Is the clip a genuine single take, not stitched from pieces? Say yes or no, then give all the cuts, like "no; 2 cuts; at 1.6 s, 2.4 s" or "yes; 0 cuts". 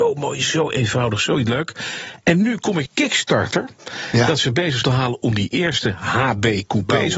no; 2 cuts; at 2.9 s, 4.8 s